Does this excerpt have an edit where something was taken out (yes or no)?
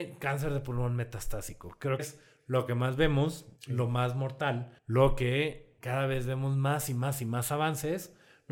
yes